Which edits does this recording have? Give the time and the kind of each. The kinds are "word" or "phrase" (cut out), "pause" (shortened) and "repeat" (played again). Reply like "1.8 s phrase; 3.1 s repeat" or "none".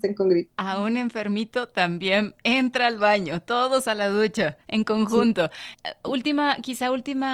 4.6 s pause; 5.7 s pause